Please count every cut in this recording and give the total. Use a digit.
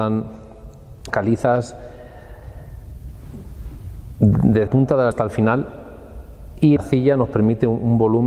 4